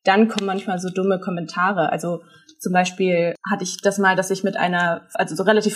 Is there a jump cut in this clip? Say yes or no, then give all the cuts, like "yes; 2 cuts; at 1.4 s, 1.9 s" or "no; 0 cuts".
no; 0 cuts